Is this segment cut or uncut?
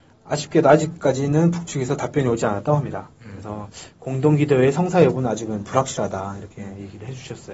uncut